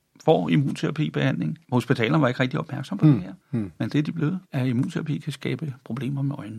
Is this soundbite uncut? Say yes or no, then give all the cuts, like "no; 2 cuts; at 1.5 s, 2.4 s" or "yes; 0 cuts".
no; 3 cuts; at 1.6 s, 3.4 s, 4.4 s